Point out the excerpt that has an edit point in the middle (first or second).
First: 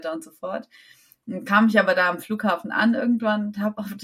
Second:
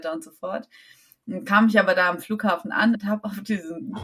second